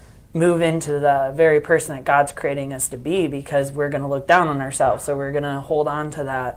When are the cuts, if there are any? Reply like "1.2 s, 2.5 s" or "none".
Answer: none